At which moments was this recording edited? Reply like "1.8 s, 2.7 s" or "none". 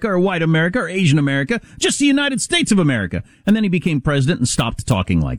none